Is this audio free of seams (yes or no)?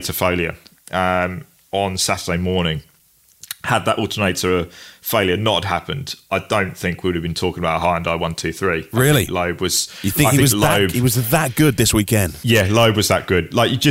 yes